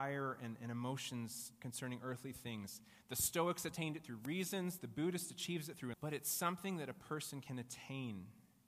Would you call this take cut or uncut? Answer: cut